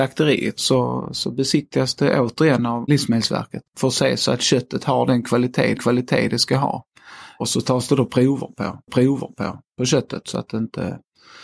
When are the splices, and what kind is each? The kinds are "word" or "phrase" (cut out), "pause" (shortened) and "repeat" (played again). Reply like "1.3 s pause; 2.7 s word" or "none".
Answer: 3.7 s pause; 5.8 s repeat; 8.9 s repeat

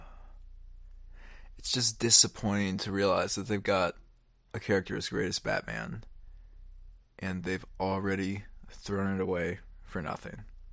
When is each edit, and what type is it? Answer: none

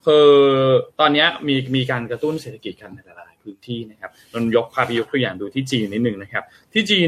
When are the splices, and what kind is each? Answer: none

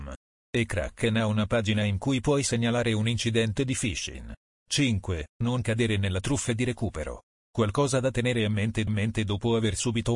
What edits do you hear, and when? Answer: 5.3 s pause; 8.9 s repeat

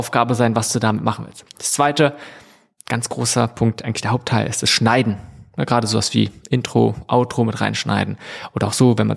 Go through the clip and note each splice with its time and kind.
none

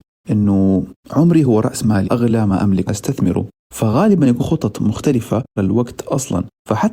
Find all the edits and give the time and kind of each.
2.0 s word; 2.9 s word; 4.4 s word; 5.6 s word

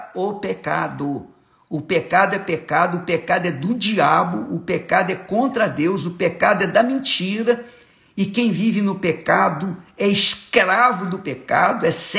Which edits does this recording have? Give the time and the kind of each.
none

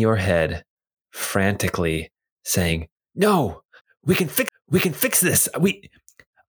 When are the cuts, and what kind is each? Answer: 4.5 s repeat

